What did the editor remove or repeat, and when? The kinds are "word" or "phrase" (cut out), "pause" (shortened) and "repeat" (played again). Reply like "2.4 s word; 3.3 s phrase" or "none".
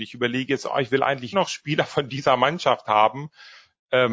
1.3 s word